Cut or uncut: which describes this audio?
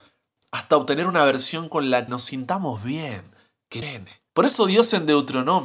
cut